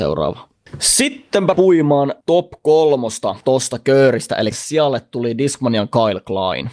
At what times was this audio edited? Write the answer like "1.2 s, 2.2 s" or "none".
1.5 s, 4.5 s